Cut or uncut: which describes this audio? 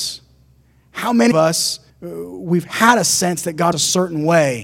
cut